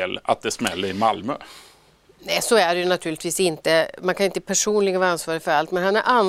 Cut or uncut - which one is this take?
uncut